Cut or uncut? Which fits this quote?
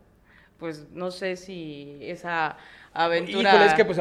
uncut